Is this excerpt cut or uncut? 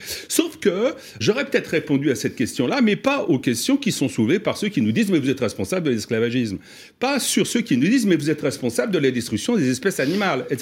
cut